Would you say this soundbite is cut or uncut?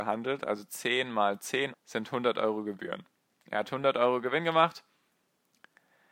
cut